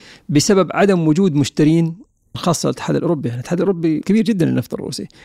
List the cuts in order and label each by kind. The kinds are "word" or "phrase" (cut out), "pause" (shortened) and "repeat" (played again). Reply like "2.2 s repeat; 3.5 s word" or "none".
2.3 s phrase; 4.0 s word